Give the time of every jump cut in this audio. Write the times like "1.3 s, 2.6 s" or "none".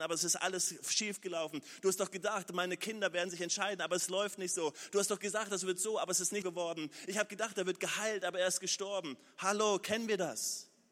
6.4 s

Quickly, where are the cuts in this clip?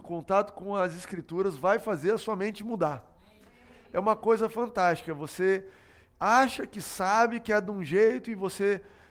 none

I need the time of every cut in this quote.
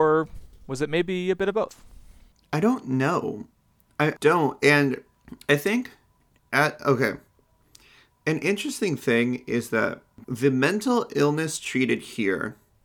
4.2 s, 6.4 s, 10.2 s

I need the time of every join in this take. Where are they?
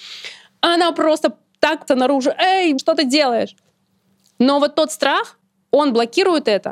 1.9 s

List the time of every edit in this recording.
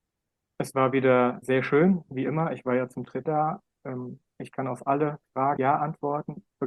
1.4 s, 3.3 s, 5.6 s

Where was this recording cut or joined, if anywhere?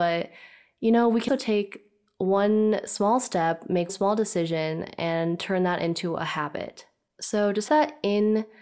1.3 s, 3.9 s, 7.7 s

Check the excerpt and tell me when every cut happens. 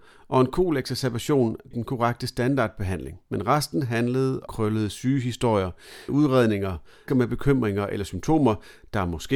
1.7 s, 3.3 s, 4.5 s, 6.1 s, 7.1 s

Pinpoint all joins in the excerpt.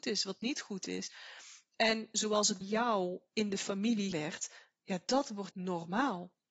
2.6 s, 4.1 s, 5.5 s

